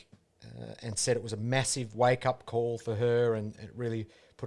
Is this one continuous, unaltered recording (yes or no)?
yes